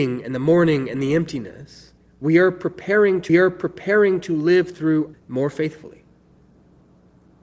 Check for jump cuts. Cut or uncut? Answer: cut